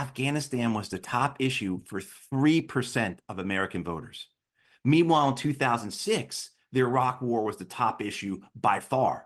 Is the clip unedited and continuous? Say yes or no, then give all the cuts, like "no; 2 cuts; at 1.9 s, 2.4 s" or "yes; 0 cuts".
yes; 0 cuts